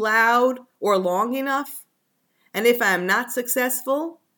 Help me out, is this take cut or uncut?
uncut